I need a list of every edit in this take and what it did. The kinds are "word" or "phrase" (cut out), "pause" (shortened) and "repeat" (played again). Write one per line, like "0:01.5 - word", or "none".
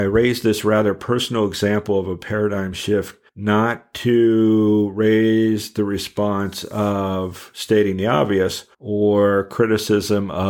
0:03.3 - pause
0:08.7 - pause